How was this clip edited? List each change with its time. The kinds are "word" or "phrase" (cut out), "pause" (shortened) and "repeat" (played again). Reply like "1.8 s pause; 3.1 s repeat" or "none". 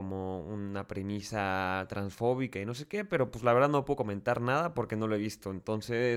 none